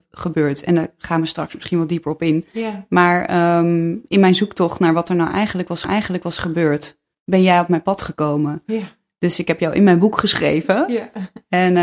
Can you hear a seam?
yes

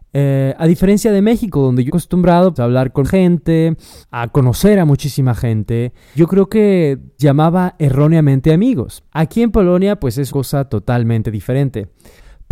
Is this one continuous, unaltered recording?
no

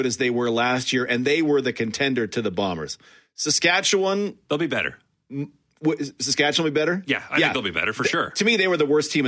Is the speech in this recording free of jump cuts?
yes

